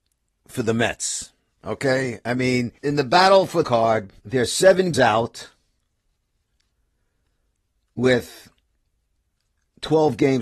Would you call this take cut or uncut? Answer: cut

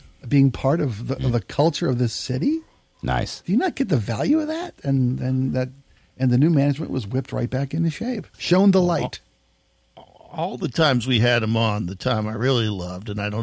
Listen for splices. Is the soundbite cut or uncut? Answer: cut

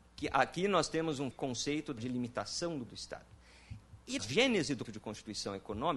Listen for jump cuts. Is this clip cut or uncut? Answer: cut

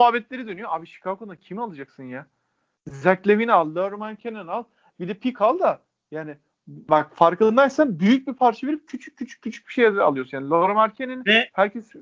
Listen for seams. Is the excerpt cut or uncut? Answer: uncut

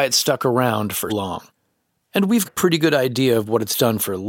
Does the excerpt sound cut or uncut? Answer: cut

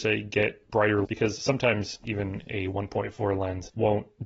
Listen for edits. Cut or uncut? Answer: cut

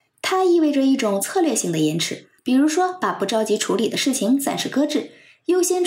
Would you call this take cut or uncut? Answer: cut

